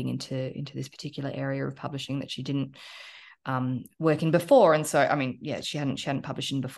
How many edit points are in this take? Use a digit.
0